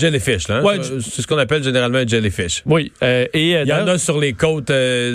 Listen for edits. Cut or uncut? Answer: uncut